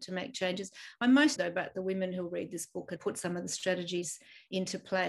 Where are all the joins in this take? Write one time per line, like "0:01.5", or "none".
0:01.4
0:03.0